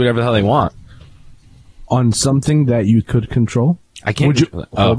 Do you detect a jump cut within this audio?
yes; 1 cut; at 3.0 s

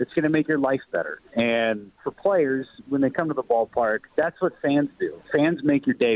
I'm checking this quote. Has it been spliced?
yes; 2 cuts; at 1.3 s, 4.1 s

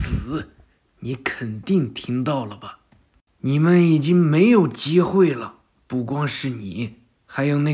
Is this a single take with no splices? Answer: yes; 0 cuts

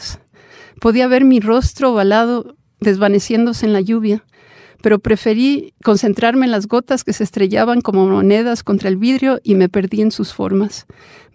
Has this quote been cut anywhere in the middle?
no; 0 cuts

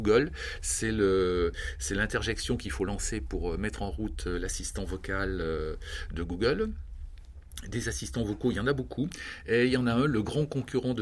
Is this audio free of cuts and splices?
yes; 0 cuts

